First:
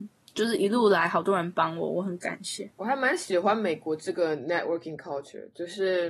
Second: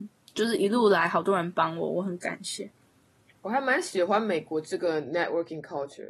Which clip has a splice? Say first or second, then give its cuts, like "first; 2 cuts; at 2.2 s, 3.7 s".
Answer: first; 1 cut; at 2.7 s